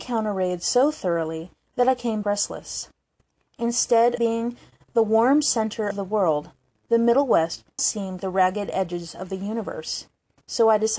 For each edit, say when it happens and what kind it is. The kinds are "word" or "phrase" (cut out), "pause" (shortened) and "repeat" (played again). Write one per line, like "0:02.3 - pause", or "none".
0:02.2 - word
0:04.2 - word
0:05.9 - word
0:07.8 - word
0:08.2 - word